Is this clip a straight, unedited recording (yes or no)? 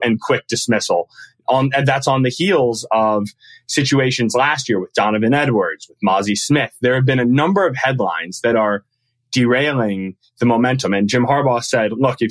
yes